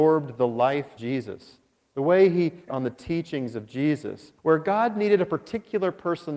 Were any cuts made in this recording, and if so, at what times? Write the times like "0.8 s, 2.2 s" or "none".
1.0 s, 2.7 s, 4.4 s